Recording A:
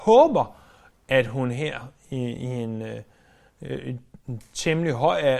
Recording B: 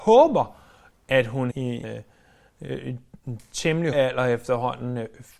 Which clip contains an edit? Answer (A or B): B